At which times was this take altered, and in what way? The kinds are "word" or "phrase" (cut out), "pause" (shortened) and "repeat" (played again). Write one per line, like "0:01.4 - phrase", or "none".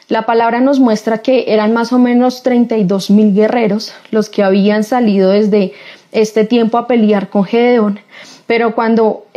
none